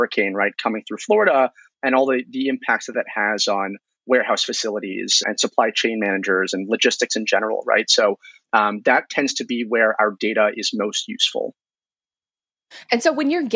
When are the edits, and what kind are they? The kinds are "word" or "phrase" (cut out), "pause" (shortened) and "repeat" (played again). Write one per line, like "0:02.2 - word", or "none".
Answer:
0:05.2 - word